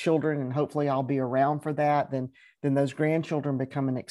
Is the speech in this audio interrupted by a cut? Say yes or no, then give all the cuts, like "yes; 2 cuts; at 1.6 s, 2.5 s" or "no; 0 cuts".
no; 0 cuts